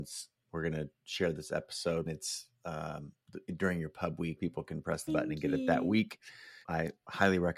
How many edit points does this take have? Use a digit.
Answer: 4